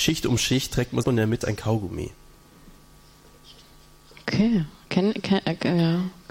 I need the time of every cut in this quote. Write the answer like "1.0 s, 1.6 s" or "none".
1.0 s, 1.4 s